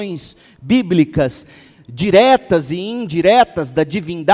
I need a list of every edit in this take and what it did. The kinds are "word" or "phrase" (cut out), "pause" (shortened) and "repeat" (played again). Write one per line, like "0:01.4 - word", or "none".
none